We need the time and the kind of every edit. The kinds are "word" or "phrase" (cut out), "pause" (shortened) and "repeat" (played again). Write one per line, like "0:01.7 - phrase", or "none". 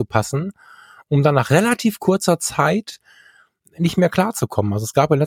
none